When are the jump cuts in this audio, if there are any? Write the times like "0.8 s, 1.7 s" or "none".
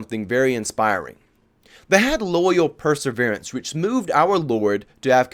none